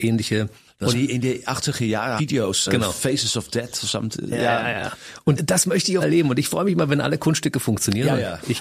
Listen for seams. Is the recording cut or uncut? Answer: cut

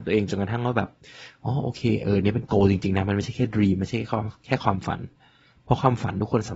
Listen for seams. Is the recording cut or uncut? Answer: uncut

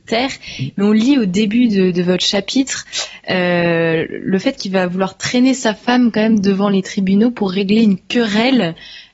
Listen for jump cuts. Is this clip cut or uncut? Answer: uncut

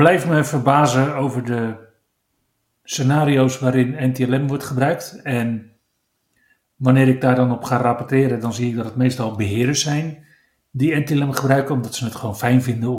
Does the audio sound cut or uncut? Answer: uncut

